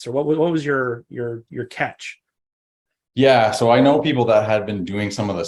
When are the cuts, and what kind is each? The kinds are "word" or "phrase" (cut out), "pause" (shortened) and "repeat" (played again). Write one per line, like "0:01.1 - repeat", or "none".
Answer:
none